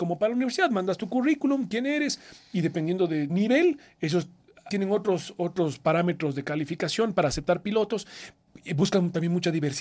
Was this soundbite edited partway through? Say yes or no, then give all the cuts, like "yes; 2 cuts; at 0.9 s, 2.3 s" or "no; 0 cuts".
yes; 2 cuts; at 3.3 s, 4.7 s